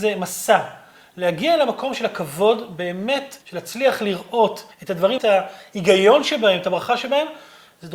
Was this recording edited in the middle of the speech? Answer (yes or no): yes